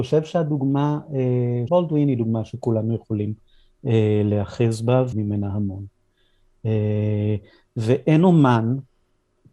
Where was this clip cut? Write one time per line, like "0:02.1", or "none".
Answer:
0:01.7
0:05.1